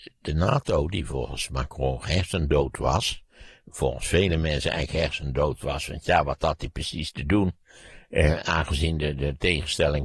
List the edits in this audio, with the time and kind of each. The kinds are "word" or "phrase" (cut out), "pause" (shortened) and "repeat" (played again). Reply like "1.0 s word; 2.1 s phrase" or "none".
none